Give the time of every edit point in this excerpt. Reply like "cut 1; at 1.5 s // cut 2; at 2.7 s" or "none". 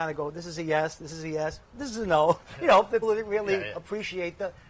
cut 1; at 3.0 s